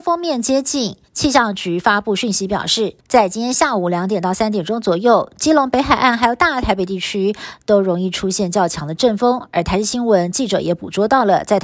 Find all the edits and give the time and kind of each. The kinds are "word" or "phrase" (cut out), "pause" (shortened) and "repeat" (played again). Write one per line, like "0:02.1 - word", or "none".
0:03.0 - pause